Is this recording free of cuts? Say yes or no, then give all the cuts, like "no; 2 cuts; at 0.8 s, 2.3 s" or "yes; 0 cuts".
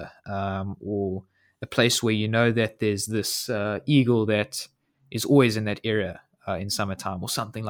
yes; 0 cuts